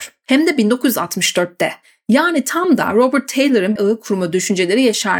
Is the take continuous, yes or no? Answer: no